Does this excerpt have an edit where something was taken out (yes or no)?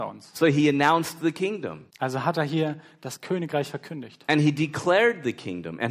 yes